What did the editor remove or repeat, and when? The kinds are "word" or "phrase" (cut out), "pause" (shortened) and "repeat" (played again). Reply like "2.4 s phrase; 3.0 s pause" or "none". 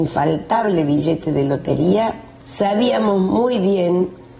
2.4 s pause